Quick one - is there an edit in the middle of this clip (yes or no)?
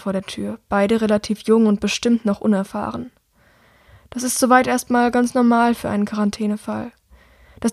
no